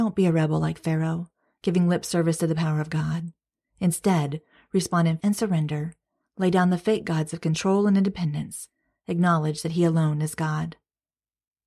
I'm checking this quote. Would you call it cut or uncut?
cut